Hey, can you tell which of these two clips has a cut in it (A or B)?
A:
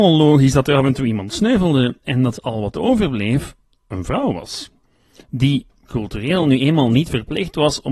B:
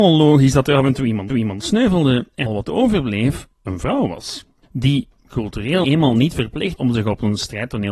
B